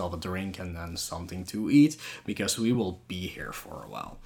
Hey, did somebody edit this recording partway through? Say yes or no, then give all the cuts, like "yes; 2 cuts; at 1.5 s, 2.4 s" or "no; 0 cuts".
no; 0 cuts